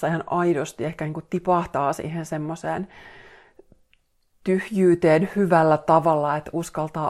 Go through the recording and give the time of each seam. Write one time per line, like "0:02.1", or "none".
none